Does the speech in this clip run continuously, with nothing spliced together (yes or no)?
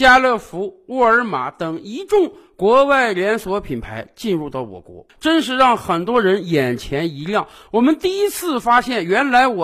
yes